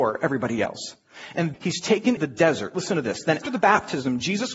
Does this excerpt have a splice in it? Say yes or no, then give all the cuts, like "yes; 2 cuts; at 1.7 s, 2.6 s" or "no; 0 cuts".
yes; 3 cuts; at 1.5 s, 2.2 s, 3.4 s